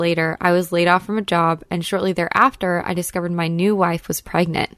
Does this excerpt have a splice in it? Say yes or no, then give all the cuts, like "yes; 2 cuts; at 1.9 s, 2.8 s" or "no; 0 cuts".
no; 0 cuts